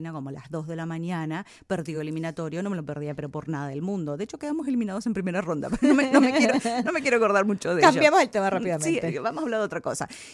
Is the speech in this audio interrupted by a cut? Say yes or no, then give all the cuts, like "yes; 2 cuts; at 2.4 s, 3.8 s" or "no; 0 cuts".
no; 0 cuts